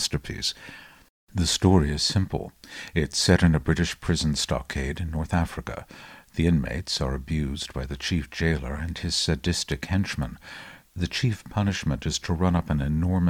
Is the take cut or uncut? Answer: uncut